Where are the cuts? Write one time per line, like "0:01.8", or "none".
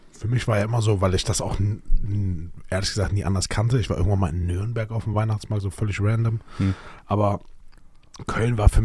none